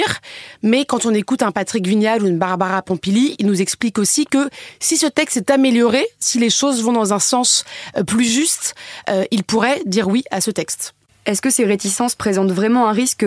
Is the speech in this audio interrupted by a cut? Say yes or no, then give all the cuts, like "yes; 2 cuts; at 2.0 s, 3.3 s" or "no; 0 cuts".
no; 0 cuts